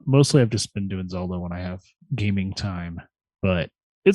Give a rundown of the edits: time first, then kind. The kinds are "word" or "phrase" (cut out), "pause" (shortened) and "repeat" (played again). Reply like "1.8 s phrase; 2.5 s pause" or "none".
2.0 s pause